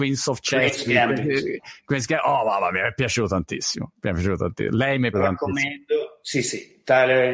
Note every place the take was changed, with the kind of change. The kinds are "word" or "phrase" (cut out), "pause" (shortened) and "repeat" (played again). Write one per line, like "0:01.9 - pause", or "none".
0:05.1 - word